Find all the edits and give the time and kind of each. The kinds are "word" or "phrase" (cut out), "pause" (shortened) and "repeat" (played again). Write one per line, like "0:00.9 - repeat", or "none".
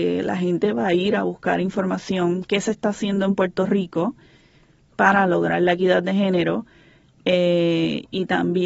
0:02.4 - word